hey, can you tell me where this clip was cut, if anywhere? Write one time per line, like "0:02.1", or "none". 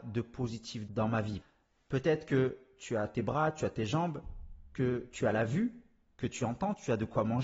none